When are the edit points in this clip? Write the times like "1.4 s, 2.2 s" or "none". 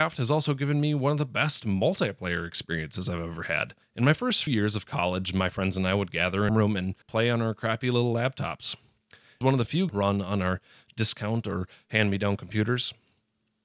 3.8 s, 4.5 s, 6.5 s, 7.0 s, 9.4 s, 9.9 s